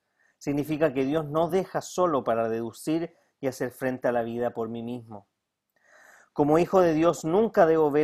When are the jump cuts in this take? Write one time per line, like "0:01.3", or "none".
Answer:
none

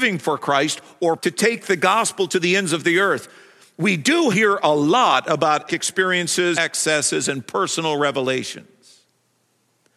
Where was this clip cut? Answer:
0:01.2
0:04.3
0:05.7
0:06.5

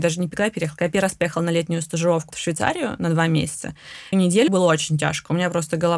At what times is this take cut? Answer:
0:02.3
0:04.1
0:04.5

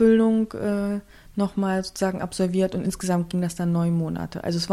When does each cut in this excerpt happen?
none

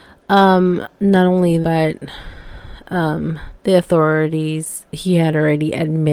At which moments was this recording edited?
0:00.9
0:01.6
0:03.6

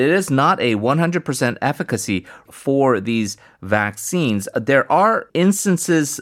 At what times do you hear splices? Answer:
0:02.5
0:05.3

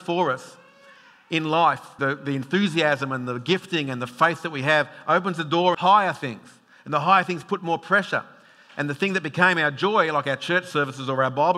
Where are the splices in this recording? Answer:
0:02.0
0:05.7

